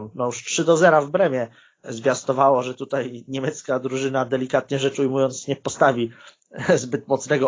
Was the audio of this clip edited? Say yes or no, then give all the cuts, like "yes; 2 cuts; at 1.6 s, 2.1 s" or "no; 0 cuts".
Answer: no; 0 cuts